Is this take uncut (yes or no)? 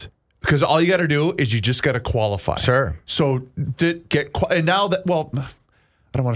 no